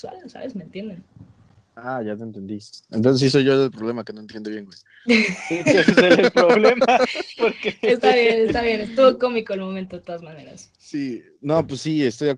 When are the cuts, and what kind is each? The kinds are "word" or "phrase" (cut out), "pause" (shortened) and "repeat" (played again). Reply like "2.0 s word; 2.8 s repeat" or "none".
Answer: none